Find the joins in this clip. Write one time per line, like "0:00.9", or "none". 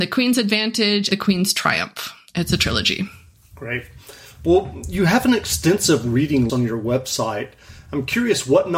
0:01.1
0:06.5